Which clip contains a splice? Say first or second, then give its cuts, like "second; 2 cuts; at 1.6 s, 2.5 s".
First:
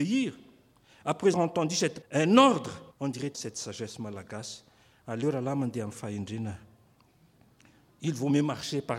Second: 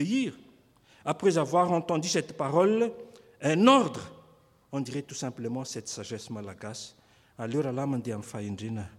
first; 4 cuts; at 1.3 s, 2.0 s, 2.9 s, 3.3 s